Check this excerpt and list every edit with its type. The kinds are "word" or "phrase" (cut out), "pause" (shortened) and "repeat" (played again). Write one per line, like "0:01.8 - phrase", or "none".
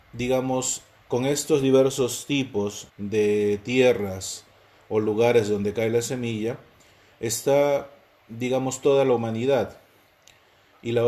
0:02.9 - pause